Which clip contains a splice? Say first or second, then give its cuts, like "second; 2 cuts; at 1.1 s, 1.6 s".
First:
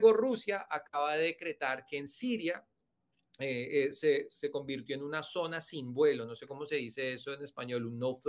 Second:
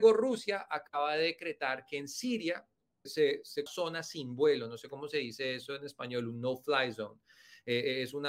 second; 2 cuts; at 3.1 s, 3.7 s